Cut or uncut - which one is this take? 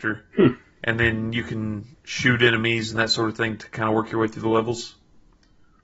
uncut